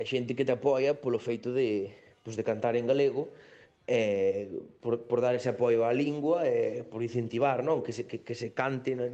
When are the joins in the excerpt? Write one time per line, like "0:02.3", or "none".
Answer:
none